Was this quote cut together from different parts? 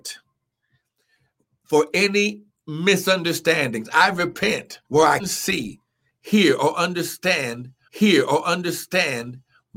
yes; 3 cuts; at 4.8 s, 5.2 s, 7.9 s

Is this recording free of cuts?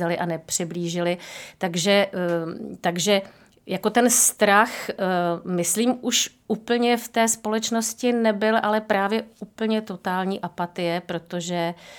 yes; 0 cuts

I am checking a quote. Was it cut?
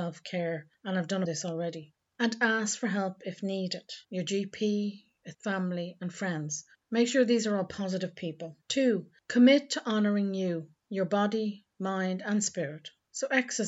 yes; 4 cuts; at 1.3 s, 4.0 s, 5.3 s, 8.6 s

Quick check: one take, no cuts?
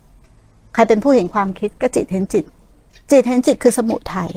no; 1 cut; at 2.9 s

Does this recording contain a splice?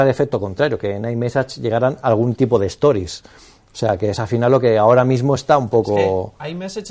no; 0 cuts

